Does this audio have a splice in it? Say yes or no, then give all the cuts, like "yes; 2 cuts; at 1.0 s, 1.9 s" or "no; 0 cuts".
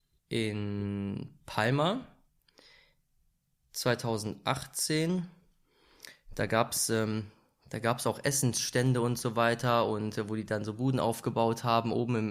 no; 0 cuts